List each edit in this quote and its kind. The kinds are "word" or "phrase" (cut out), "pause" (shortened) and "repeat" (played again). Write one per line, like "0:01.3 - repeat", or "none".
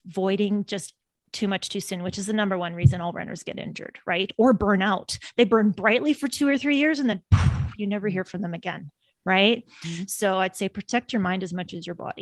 none